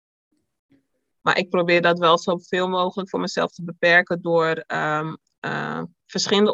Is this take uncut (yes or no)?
yes